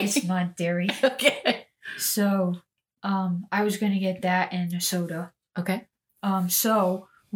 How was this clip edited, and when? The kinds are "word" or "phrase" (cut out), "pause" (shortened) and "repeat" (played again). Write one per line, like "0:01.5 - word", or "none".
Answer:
none